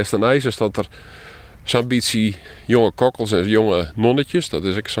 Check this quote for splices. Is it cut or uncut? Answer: uncut